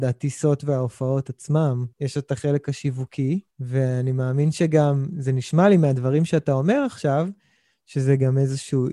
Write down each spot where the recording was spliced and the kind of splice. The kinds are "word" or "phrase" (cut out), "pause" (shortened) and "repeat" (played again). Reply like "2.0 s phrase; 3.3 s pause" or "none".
1.9 s pause; 3.5 s pause